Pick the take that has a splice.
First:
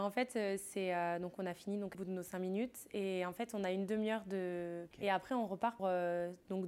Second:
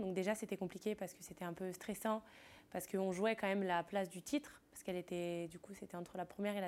first; 3 cuts; at 1.9 s, 4.9 s, 5.8 s

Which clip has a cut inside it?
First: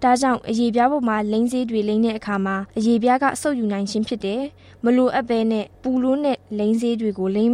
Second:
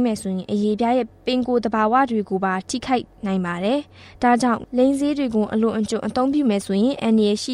first; 2 cuts; at 2.7 s, 5.7 s

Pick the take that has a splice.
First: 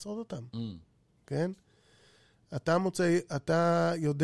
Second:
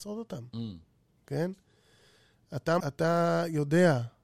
second; 1 cut; at 2.8 s

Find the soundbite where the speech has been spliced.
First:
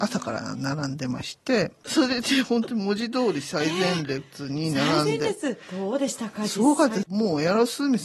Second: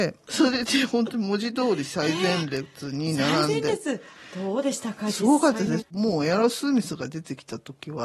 first; 2 cuts; at 5.6 s, 7.0 s

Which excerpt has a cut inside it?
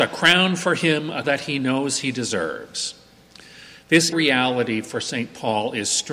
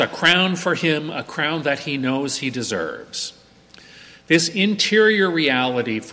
first; 2 cuts; at 1.2 s, 4.1 s

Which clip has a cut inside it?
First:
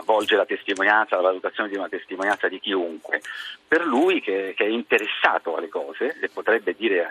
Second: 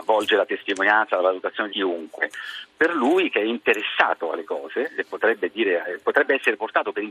second; 2 cuts; at 1.7 s, 3.3 s

